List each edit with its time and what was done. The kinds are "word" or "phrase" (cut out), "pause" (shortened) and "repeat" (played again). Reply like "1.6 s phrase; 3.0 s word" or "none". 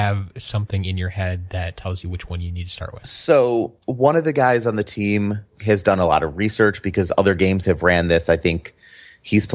3.8 s pause